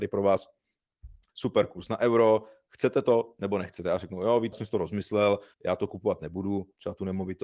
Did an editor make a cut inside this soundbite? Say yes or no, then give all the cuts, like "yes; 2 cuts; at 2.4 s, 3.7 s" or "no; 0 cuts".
yes; 3 cuts; at 1.3 s, 4.5 s, 5.5 s